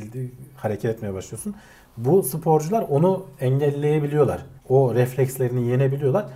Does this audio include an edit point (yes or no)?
yes